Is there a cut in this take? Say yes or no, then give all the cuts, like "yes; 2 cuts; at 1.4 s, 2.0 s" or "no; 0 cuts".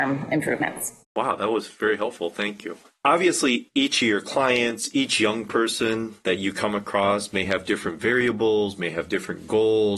no; 0 cuts